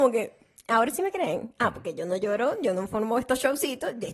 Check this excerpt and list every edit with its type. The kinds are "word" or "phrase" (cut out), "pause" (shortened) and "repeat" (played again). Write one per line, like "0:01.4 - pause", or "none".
none